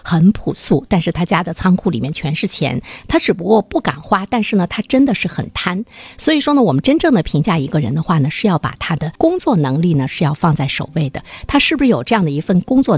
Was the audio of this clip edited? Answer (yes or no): yes